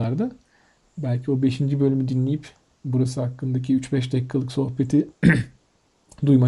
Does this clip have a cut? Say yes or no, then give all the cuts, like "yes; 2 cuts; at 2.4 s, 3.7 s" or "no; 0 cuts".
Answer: no; 0 cuts